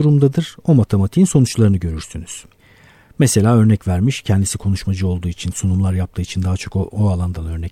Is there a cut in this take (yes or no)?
no